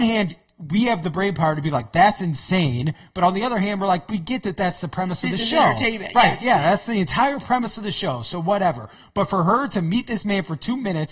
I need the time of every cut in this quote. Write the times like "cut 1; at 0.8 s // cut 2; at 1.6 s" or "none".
none